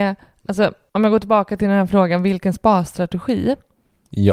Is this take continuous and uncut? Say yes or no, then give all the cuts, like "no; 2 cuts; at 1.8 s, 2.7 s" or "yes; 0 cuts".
yes; 0 cuts